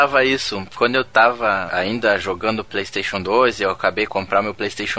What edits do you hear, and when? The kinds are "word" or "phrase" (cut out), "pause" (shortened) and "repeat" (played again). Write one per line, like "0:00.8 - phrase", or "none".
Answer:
0:04.1 - word